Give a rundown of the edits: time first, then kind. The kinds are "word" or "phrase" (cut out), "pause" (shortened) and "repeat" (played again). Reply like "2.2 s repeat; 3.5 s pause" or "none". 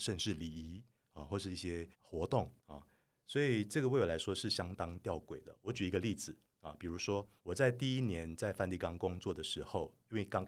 1.9 s pause; 2.6 s pause; 7.4 s pause

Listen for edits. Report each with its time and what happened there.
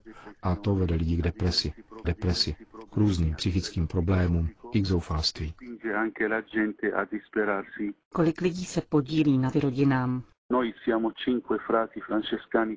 2.0 s repeat; 9.5 s phrase

